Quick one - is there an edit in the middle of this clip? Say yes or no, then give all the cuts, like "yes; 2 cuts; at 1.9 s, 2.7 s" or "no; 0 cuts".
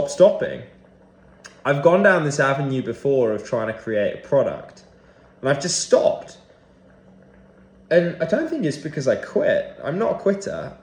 no; 0 cuts